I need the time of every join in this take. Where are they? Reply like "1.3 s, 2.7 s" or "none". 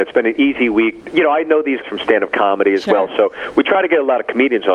1.8 s